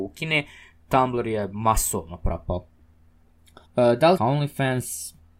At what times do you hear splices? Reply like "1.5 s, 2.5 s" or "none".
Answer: 3.7 s, 4.2 s